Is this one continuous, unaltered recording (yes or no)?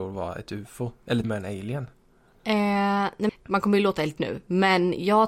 no